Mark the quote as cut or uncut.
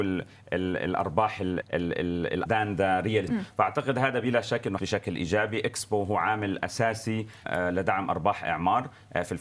cut